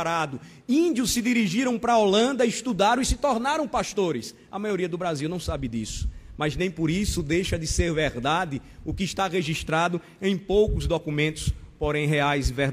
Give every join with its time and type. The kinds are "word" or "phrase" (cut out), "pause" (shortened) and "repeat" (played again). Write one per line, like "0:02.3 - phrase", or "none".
none